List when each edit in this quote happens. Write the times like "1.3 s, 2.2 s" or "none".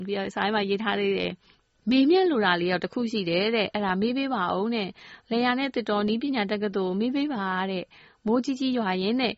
none